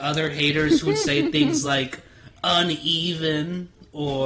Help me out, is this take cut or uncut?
uncut